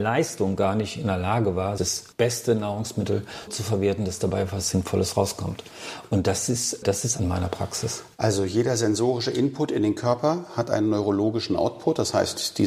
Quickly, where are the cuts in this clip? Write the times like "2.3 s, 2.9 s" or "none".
1.8 s, 2.1 s, 3.5 s, 6.8 s, 7.2 s